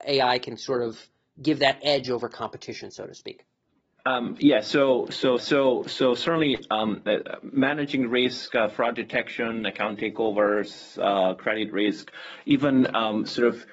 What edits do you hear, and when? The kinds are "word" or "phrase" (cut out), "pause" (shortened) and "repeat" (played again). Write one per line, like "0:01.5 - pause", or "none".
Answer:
0:05.4 - repeat